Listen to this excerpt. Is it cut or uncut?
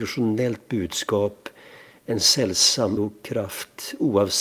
cut